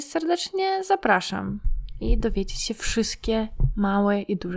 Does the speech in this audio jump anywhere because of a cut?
no; 0 cuts

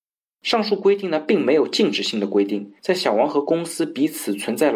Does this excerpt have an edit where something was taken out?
yes; 1 cut; at 2.8 s

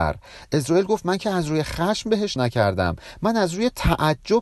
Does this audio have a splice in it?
yes; 1 cut; at 2.4 s

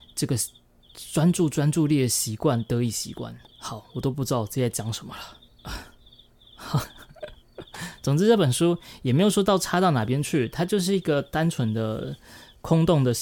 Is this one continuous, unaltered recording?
no; 2 cuts; at 3.5 s, 5.5 s

